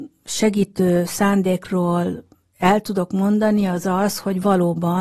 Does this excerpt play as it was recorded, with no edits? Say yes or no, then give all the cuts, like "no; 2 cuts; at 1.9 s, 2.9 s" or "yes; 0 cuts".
yes; 0 cuts